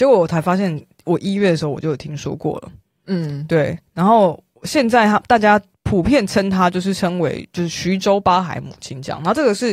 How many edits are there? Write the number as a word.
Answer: zero